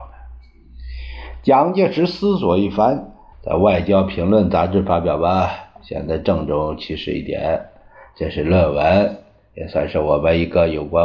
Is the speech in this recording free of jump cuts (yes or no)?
no